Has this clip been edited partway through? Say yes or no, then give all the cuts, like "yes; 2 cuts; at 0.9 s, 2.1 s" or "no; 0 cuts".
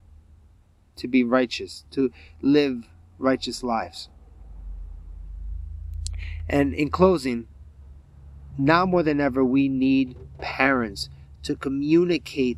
no; 0 cuts